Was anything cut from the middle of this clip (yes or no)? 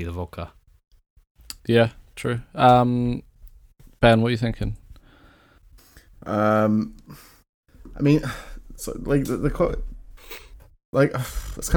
no